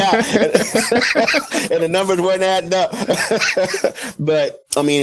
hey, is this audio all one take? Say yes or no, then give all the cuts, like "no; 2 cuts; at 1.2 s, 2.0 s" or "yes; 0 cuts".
yes; 0 cuts